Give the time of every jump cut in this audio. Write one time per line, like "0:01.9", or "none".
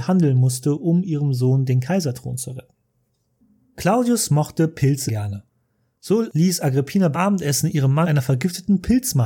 0:05.1
0:07.1
0:08.0